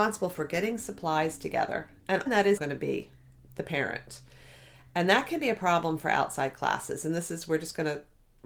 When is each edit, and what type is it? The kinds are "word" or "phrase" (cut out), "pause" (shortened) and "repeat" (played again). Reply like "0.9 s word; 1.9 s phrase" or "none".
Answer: 2.3 s word; 2.6 s word